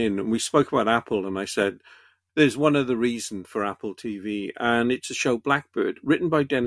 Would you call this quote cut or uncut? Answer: uncut